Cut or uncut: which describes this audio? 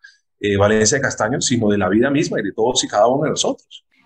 uncut